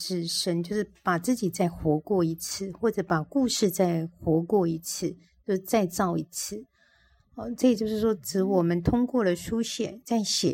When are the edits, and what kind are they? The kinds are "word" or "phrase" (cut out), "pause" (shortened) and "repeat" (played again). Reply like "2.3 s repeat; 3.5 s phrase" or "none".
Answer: none